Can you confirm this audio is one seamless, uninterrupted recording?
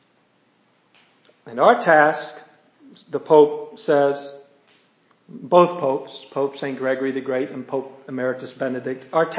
yes; 0 cuts

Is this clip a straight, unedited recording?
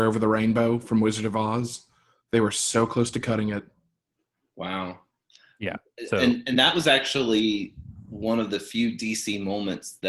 yes; 0 cuts

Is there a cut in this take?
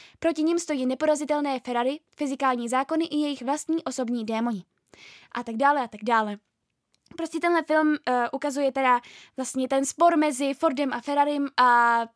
no; 0 cuts

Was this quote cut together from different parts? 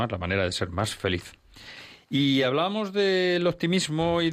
no; 0 cuts

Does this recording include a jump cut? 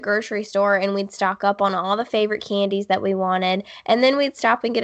no; 0 cuts

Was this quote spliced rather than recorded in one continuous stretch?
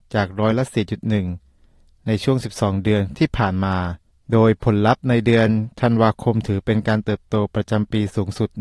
no; 0 cuts

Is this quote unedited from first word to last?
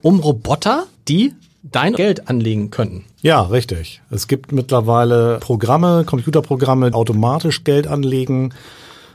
no; 5 cuts; at 1.0 s, 2.0 s, 3.1 s, 5.4 s, 6.9 s

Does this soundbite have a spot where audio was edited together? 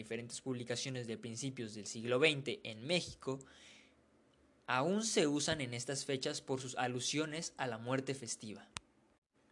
no; 0 cuts

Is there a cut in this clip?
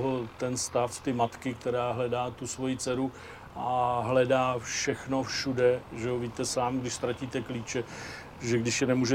no; 0 cuts

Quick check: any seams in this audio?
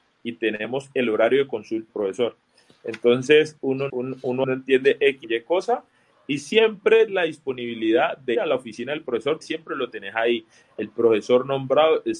yes; 7 cuts; at 1.9 s, 3.9 s, 4.4 s, 5.2 s, 7.1 s, 8.3 s, 9.4 s

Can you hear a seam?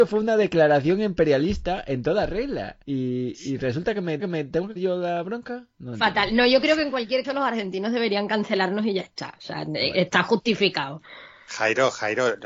yes; 4 cuts; at 2.8 s, 4.2 s, 4.8 s, 7.2 s

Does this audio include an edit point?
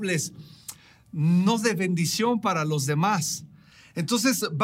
no; 0 cuts

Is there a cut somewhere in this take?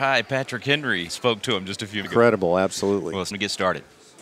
yes; 3 cuts; at 1.1 s, 2.0 s, 3.3 s

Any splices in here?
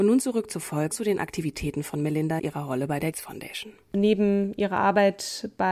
yes; 3 cuts; at 0.9 s, 2.4 s, 3.1 s

